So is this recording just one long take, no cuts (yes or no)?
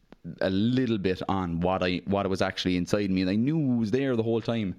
yes